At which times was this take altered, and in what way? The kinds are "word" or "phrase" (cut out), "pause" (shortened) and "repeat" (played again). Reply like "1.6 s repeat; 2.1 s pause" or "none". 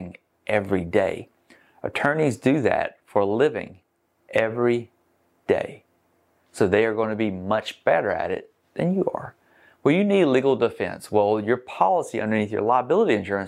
none